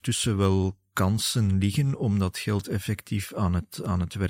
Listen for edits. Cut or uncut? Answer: uncut